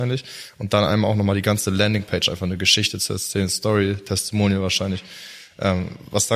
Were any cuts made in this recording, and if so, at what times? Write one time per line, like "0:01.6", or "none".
none